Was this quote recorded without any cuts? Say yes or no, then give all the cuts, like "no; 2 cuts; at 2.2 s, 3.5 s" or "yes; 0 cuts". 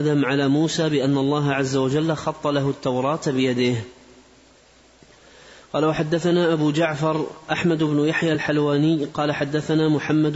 yes; 0 cuts